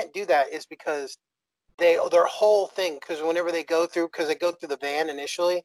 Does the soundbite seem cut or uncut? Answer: uncut